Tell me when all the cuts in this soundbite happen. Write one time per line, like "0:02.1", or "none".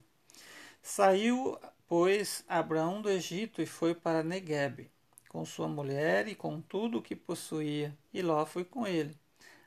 0:08.0